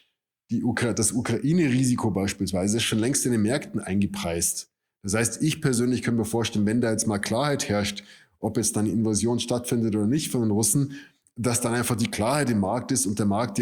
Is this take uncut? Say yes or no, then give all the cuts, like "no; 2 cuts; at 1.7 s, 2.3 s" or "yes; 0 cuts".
yes; 0 cuts